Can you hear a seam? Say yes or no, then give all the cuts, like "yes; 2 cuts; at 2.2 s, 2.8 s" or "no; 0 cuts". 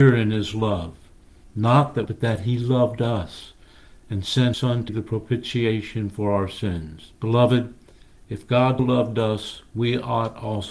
yes; 5 cuts; at 2.1 s, 4.5 s, 4.9 s, 7.1 s, 8.8 s